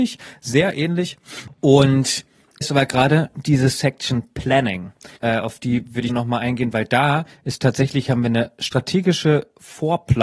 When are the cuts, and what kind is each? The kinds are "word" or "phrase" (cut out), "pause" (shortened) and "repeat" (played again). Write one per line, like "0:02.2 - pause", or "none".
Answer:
0:02.6 - phrase
0:05.2 - pause
0:06.1 - phrase